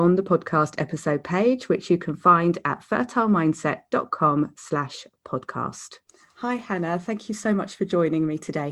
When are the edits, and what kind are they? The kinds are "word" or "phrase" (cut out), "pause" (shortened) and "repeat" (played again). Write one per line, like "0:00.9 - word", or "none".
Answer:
0:06.1 - pause